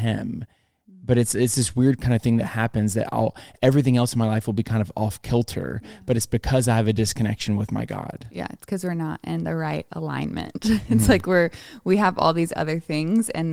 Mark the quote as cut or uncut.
uncut